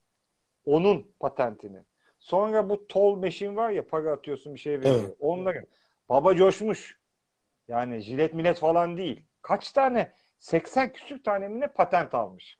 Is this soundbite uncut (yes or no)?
yes